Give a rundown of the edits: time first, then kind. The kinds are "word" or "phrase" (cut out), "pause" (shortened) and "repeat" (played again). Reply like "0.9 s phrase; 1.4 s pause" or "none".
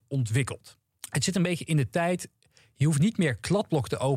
none

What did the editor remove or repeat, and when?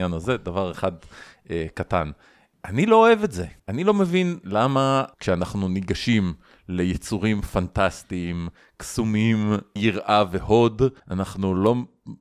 3.6 s pause; 4.4 s word; 5.1 s pause; 9.8 s word; 11.0 s pause

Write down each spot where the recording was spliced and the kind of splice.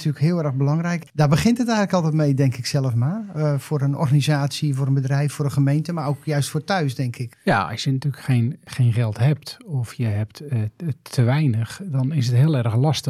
none

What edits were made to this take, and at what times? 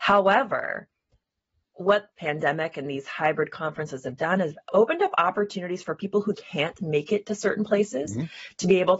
2.1 s word; 6.3 s word

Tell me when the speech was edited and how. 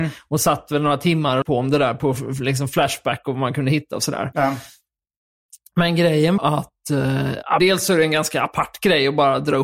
1.4 s word; 6.4 s word; 7.6 s word

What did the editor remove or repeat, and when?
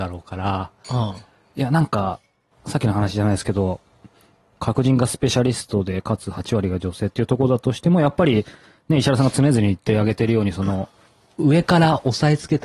none

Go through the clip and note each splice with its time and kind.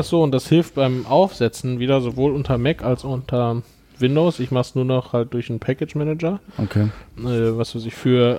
none

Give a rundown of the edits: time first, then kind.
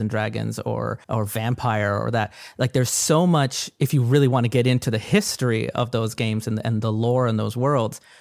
1.0 s pause

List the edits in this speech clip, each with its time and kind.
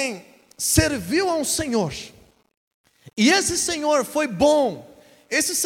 none

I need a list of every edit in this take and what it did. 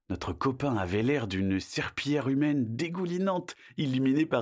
none

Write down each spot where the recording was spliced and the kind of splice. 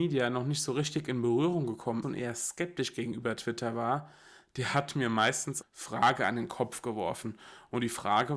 2.0 s word; 5.6 s word

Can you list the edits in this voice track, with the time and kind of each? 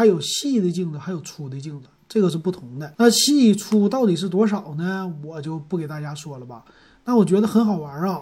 2.9 s pause

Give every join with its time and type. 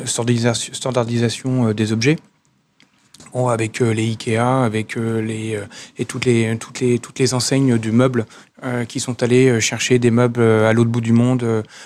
none

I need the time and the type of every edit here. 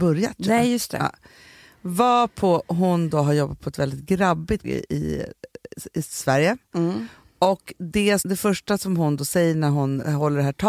4.6 s word; 8.2 s word

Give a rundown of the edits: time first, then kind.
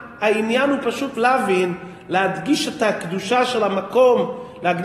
1.1 s word

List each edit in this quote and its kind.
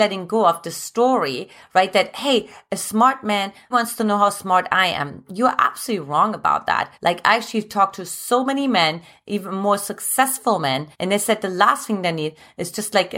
3.7 s word; 6.9 s pause; 10.9 s pause

